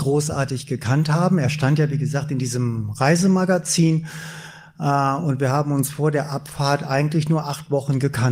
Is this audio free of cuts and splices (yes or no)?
yes